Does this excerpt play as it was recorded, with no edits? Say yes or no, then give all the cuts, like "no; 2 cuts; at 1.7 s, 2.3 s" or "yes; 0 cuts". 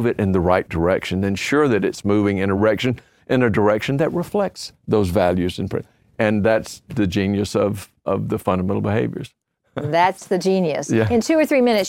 yes; 0 cuts